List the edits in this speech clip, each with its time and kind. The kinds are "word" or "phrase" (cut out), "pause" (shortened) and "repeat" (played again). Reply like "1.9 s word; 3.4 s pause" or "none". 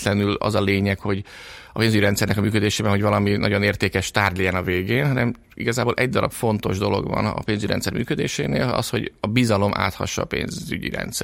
none